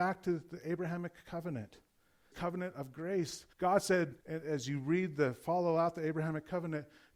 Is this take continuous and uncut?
no; 3 cuts; at 2.3 s, 3.5 s, 4.2 s

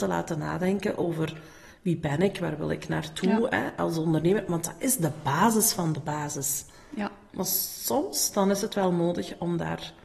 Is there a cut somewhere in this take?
no; 0 cuts

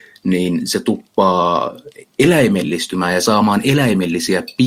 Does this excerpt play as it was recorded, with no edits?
yes; 0 cuts

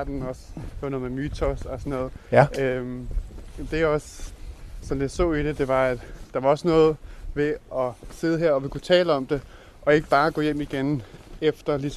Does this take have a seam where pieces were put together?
yes; 1 cut; at 3.7 s

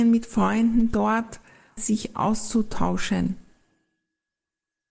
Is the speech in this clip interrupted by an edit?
yes; 1 cut; at 1.8 s

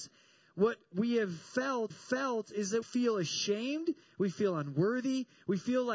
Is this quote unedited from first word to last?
no; 2 cuts; at 1.9 s, 2.8 s

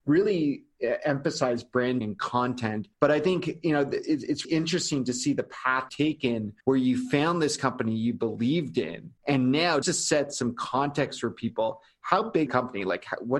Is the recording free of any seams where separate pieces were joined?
no; 8 cuts; at 2.0 s, 2.9 s, 4.4 s, 5.9 s, 6.6 s, 9.2 s, 9.8 s, 12.5 s

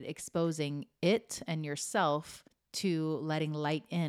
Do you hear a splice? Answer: yes; 1 cut; at 2.5 s

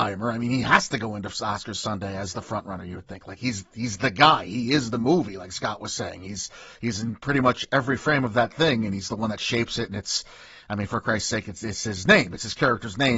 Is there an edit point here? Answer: no; 0 cuts

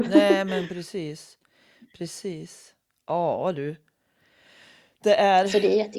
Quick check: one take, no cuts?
yes; 0 cuts

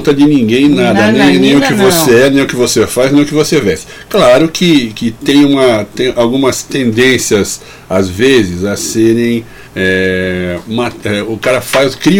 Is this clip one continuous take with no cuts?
no; 1 cut; at 9.7 s

